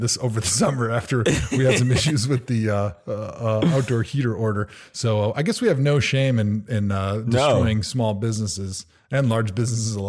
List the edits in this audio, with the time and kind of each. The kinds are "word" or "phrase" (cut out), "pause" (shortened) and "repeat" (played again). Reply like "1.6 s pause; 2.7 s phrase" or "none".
none